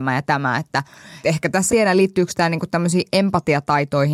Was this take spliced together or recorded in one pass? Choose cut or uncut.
cut